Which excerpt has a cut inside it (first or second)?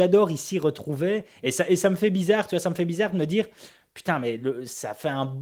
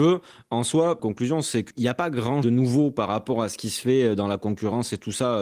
second